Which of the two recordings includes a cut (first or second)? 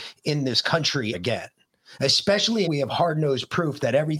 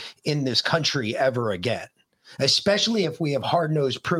first